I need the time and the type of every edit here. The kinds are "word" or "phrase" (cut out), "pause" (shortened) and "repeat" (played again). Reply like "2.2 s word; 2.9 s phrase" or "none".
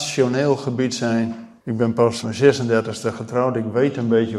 1.6 s pause; 2.2 s word

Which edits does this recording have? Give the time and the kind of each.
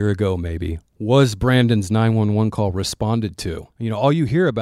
3.7 s pause

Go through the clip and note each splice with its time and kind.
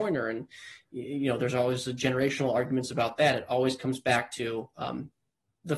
none

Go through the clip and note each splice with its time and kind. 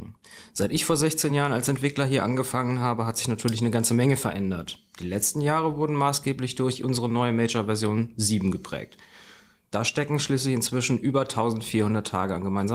none

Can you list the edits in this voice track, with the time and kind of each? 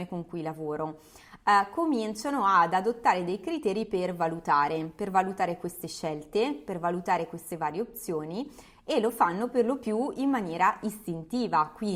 none

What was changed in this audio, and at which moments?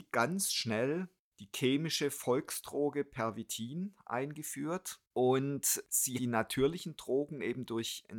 6.1 s word

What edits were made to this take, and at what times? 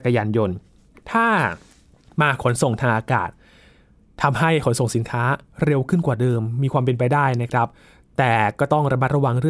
none

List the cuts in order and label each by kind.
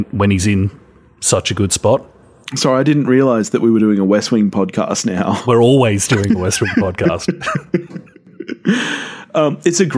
none

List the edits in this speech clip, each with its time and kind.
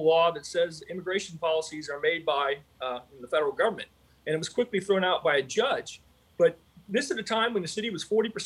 none

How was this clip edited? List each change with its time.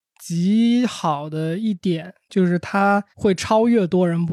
3.1 s pause

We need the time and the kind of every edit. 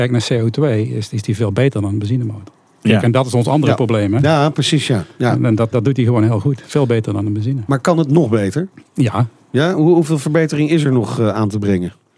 5.7 s word

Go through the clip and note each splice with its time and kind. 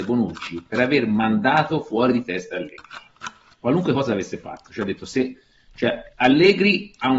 none

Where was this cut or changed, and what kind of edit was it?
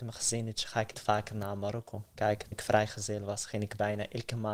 0.9 s word; 2.5 s word

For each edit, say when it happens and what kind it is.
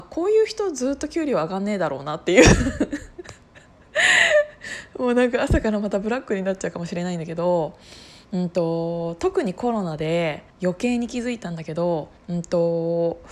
10.5 s pause; 12.2 s pause

